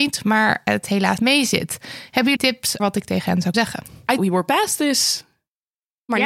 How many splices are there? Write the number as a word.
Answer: five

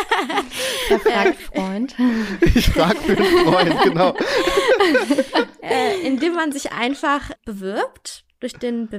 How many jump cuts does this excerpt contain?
two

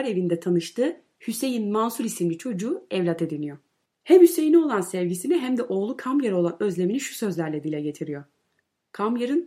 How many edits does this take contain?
zero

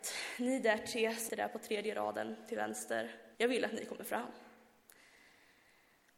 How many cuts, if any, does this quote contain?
two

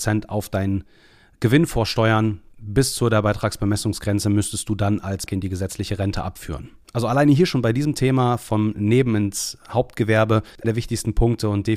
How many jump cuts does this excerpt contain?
three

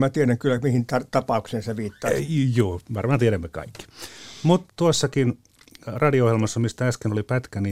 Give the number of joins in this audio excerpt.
one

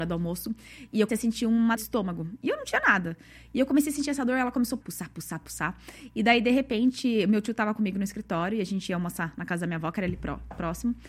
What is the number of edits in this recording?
four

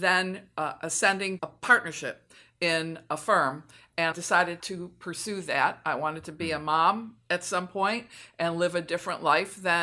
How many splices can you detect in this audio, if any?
three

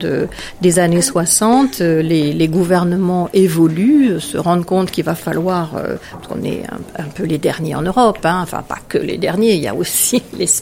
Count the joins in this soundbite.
zero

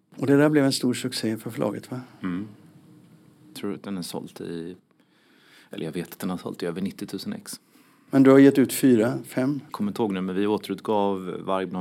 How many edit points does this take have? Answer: one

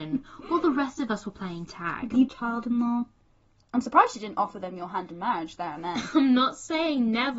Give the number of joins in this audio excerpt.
one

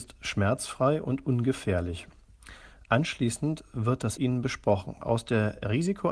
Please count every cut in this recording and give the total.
one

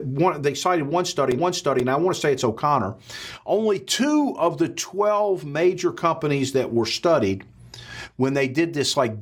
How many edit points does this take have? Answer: one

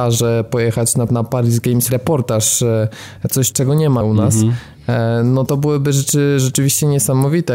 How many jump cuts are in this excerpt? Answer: five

